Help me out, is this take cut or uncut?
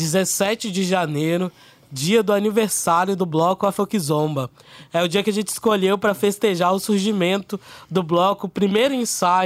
uncut